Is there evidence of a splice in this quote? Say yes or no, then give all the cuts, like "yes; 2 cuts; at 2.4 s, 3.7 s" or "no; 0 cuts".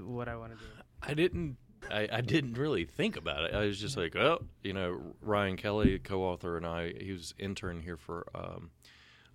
yes; 1 cut; at 1.8 s